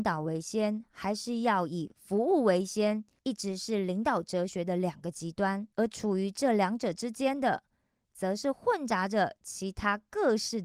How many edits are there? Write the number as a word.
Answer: two